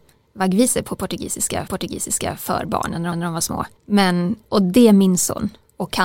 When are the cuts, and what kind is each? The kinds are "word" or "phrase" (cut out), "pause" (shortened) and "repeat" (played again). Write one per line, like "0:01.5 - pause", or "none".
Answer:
0:01.7 - repeat
0:03.1 - repeat
0:03.8 - pause